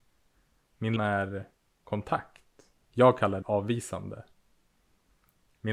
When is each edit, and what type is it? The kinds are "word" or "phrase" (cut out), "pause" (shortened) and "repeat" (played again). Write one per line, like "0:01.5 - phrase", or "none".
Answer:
0:01.0 - word
0:02.8 - pause
0:03.4 - word